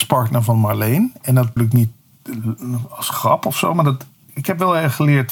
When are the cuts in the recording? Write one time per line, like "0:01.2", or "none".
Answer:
0:01.6